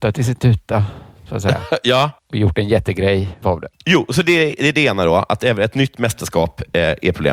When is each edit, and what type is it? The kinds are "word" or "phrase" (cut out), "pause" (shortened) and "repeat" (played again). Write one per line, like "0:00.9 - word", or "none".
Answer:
0:02.2 - pause
0:03.4 - word
0:03.7 - pause